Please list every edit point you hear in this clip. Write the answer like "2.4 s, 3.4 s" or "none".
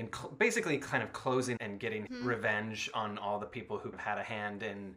1.6 s, 2.1 s, 3.9 s